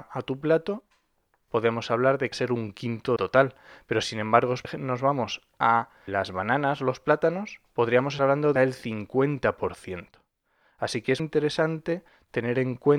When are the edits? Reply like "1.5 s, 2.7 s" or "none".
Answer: 2.3 s, 3.2 s, 4.6 s, 6.1 s, 8.2 s, 8.6 s, 11.2 s